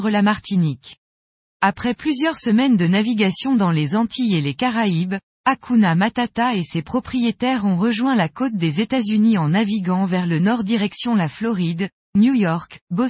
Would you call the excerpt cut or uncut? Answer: uncut